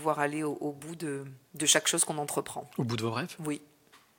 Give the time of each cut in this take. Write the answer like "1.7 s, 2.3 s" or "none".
1.4 s